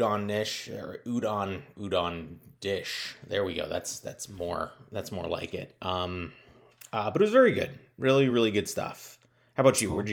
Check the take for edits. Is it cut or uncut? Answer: uncut